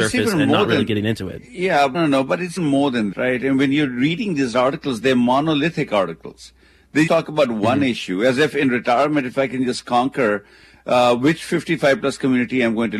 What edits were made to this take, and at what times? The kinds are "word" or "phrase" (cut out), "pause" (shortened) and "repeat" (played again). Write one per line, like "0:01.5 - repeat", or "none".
0:01.9 - word
0:02.6 - word
0:03.1 - word
0:07.1 - word